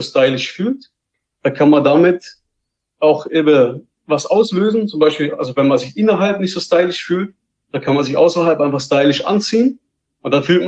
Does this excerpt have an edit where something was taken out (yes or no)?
no